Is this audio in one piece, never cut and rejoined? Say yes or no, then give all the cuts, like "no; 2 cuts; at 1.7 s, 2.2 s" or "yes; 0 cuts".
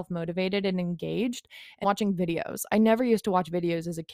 no; 1 cut; at 1.8 s